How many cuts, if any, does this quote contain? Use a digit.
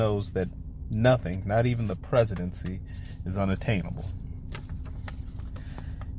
0